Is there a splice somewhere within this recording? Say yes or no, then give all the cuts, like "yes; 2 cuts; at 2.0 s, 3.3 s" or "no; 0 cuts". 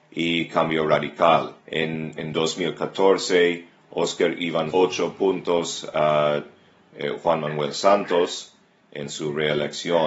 yes; 2 cuts; at 1.6 s, 4.7 s